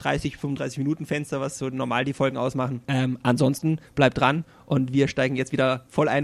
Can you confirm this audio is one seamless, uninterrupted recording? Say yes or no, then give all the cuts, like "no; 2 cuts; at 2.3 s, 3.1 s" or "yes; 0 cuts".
no; 1 cut; at 2.8 s